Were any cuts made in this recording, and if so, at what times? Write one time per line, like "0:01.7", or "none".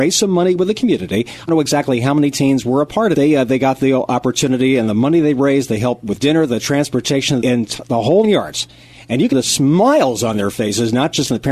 0:01.5
0:03.1
0:06.2
0:07.4
0:08.2
0:09.3